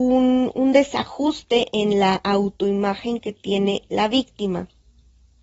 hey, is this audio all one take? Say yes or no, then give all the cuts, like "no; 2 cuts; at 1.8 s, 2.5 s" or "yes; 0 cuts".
yes; 0 cuts